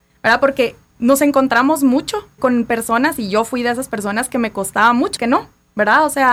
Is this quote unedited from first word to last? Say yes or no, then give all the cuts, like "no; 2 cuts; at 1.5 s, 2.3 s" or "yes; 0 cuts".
no; 2 cuts; at 2.4 s, 5.2 s